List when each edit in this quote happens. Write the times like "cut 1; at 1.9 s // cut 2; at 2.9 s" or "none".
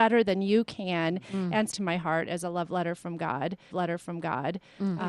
cut 1; at 1.7 s // cut 2; at 3.7 s